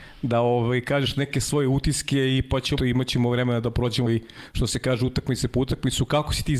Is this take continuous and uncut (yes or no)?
no